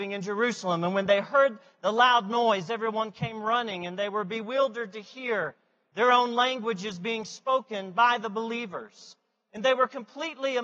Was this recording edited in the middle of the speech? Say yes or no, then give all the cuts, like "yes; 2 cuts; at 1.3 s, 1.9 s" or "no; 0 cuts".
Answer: no; 0 cuts